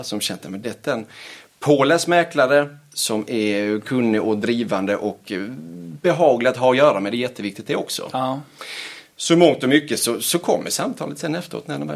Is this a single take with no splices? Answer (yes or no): yes